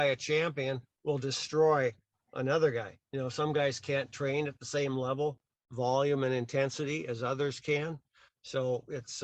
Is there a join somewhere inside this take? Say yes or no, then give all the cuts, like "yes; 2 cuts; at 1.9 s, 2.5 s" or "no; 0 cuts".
no; 0 cuts